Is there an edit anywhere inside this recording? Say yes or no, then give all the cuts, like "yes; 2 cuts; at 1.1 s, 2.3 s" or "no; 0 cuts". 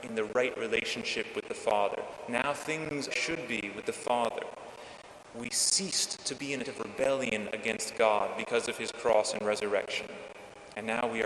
yes; 2 cuts; at 3.1 s, 6.6 s